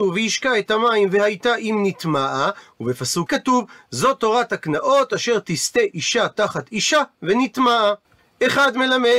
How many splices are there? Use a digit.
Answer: 1